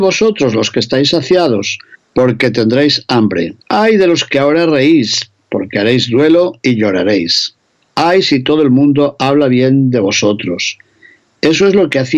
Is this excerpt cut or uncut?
cut